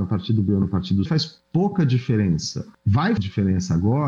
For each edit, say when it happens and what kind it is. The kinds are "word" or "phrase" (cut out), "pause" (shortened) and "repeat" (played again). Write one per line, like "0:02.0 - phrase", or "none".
0:01.1 - word
0:03.2 - word